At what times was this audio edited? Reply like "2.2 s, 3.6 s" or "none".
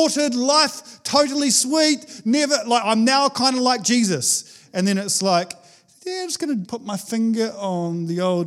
6.6 s